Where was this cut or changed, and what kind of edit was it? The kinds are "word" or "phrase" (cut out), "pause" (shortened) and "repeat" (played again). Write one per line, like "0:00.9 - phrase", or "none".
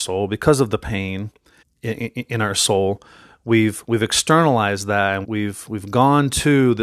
0:01.6 - word
0:05.2 - word